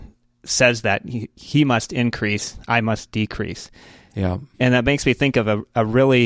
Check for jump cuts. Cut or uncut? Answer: uncut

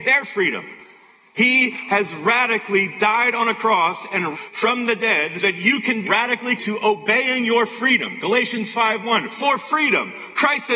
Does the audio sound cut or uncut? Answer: cut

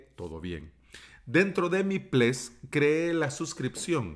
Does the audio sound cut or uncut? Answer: uncut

